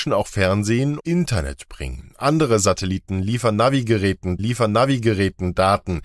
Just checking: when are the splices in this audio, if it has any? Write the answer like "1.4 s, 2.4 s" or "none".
1.0 s, 4.4 s